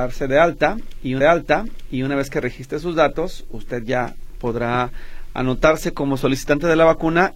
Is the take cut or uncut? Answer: cut